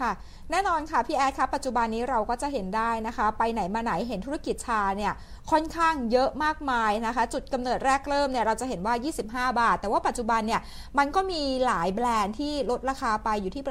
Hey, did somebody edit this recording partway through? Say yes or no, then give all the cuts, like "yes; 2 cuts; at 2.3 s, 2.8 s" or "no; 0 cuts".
no; 0 cuts